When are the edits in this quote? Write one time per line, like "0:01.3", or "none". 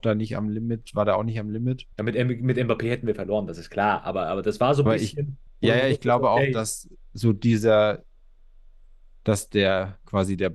0:01.9
0:05.5